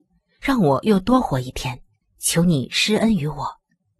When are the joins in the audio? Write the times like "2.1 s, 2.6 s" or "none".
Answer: 2.0 s